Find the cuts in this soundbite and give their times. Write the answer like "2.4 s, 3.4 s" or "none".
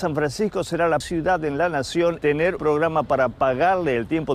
1.0 s, 2.2 s, 2.6 s